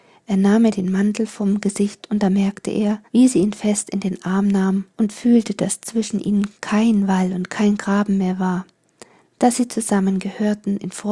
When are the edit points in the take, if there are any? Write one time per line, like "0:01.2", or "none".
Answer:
0:03.1
0:04.9